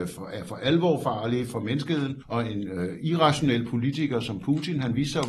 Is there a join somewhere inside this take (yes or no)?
no